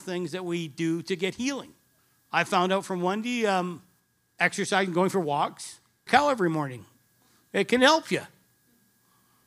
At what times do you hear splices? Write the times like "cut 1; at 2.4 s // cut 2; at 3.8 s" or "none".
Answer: cut 1; at 2.0 s // cut 2; at 4.0 s // cut 3; at 6.1 s

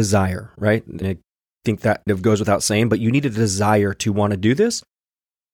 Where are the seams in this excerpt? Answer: cut 1; at 1.0 s // cut 2; at 2.1 s

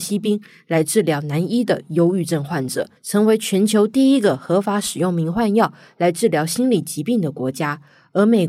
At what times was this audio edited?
cut 1; at 3.0 s

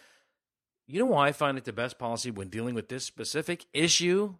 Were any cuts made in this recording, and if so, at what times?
none

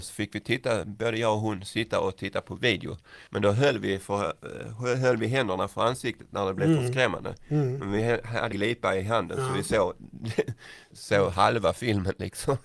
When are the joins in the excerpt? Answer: cut 1; at 3.3 s // cut 2; at 8.5 s // cut 3; at 10.9 s

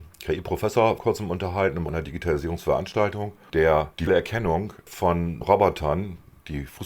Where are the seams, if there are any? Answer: cut 1; at 1.0 s // cut 2; at 1.9 s // cut 3; at 4.1 s // cut 4; at 5.4 s

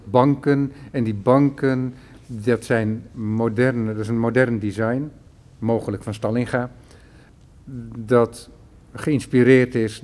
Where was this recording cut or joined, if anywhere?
none

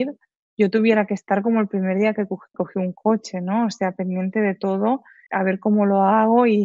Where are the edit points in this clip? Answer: cut 1; at 2.5 s // cut 2; at 5.3 s

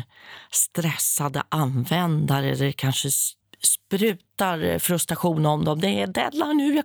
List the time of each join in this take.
cut 1; at 3.4 s

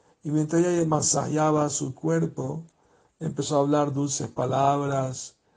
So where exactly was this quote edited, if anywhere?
none

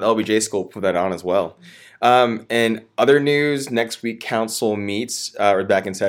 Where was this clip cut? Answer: none

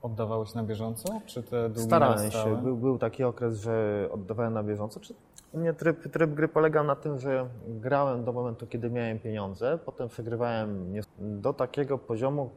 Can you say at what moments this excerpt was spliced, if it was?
cut 1; at 11.0 s

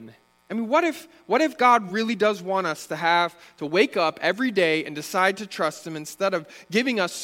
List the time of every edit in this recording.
none

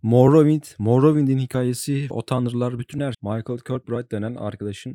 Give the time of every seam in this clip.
cut 1; at 2.1 s // cut 2; at 3.1 s

